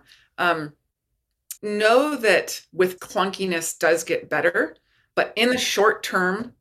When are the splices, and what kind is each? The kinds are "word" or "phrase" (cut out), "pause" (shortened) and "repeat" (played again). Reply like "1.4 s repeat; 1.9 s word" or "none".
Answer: 1.6 s word; 3.0 s word